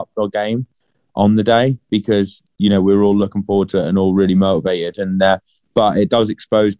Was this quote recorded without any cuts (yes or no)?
yes